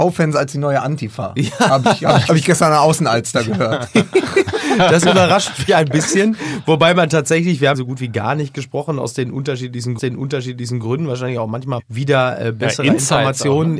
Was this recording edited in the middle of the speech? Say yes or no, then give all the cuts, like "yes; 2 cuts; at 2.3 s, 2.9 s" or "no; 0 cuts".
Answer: yes; 5 cuts; at 2.3 s, 5.7 s, 7.7 s, 10.0 s, 11.8 s